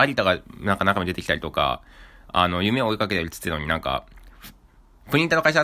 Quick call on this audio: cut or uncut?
uncut